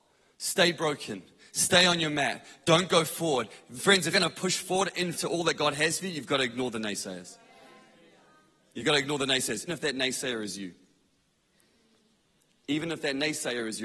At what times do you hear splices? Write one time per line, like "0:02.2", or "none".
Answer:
0:04.1
0:05.1
0:09.7